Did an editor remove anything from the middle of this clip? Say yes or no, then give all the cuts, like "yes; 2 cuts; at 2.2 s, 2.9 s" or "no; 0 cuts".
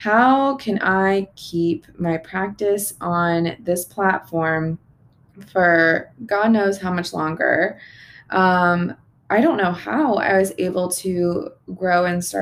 no; 0 cuts